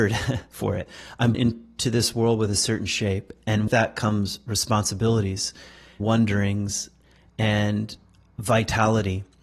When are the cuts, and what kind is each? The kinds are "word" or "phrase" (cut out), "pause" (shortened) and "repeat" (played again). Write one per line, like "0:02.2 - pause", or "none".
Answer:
0:01.3 - word
0:03.7 - word
0:06.0 - phrase